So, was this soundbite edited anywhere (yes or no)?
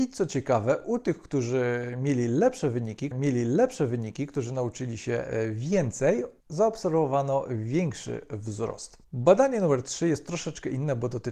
yes